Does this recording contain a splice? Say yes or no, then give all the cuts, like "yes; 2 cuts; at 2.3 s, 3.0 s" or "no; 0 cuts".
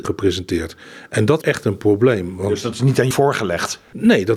yes; 2 cuts; at 1.4 s, 3.1 s